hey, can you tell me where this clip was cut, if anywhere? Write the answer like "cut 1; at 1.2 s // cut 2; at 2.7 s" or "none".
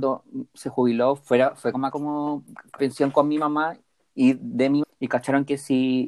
cut 1; at 1.9 s // cut 2; at 2.8 s // cut 3; at 4.8 s